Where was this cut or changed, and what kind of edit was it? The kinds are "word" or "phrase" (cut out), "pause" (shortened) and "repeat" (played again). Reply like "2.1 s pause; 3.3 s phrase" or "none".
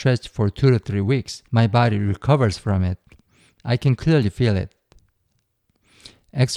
1.5 s pause

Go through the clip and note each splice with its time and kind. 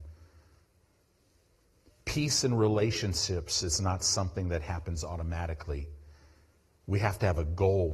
none

